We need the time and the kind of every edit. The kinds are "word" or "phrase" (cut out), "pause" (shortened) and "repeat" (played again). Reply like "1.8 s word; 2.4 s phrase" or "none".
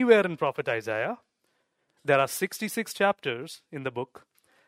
none